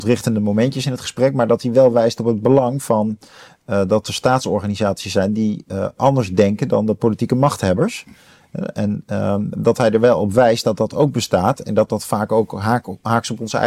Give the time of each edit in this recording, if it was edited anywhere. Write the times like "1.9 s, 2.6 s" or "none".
none

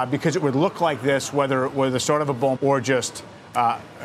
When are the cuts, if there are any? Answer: 2.6 s

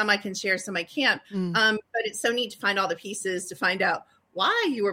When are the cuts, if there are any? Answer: 1.2 s

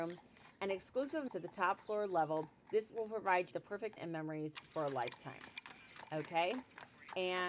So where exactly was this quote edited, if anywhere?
1.3 s, 2.9 s, 3.5 s, 4.0 s

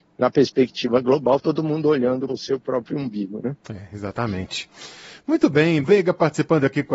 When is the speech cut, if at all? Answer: 1.4 s, 2.3 s, 5.8 s

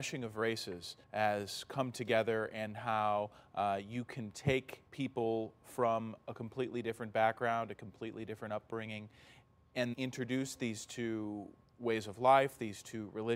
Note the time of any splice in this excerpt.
1.0 s, 4.9 s, 9.9 s, 11.6 s

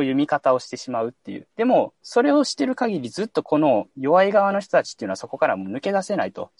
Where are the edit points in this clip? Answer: 3.9 s

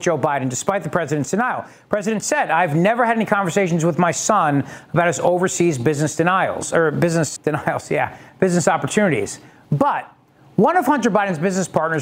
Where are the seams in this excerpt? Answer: 7.4 s

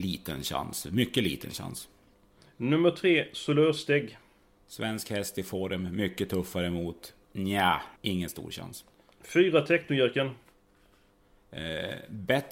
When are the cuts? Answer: 8.0 s

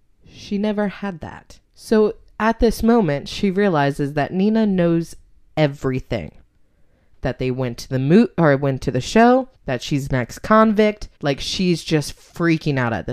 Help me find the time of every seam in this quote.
1.6 s, 9.5 s, 11.2 s

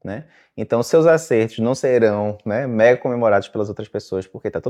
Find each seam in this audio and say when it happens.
none

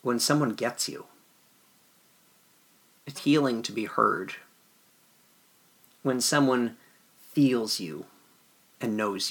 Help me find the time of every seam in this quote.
3.2 s

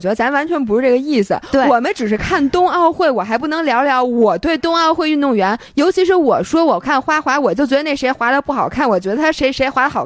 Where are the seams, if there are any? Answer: none

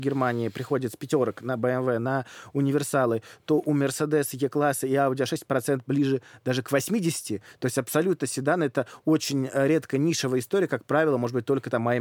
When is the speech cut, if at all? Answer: none

